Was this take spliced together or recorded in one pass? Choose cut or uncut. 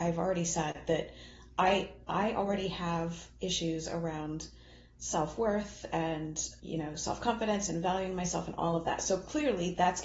cut